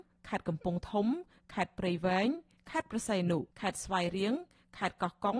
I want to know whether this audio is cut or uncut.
cut